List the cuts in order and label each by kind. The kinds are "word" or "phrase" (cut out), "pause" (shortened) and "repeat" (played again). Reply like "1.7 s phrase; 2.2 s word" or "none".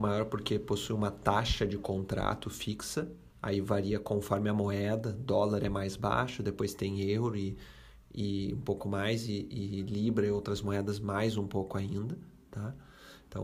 3.3 s pause

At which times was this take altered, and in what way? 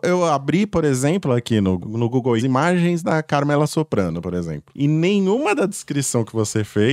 1.8 s word; 2.4 s word

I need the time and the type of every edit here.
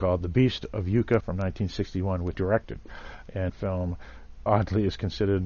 1.2 s word; 2.3 s word; 3.5 s word; 4.5 s word

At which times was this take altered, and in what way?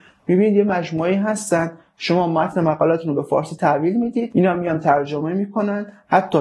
none

